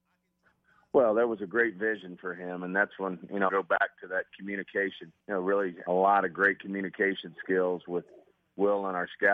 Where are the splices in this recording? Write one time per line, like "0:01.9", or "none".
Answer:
0:03.5
0:05.2
0:05.9